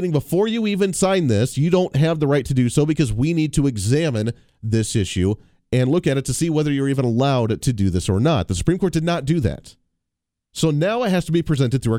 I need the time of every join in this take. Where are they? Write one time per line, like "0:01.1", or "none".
none